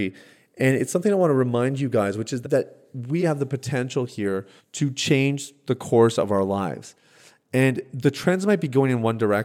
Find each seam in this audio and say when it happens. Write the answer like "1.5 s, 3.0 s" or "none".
2.4 s, 3.2 s, 4.6 s